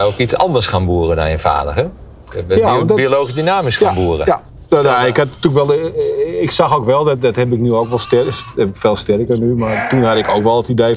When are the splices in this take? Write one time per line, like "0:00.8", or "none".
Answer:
0:04.7